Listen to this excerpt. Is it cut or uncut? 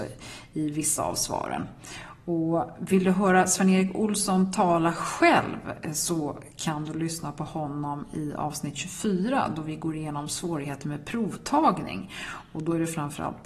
uncut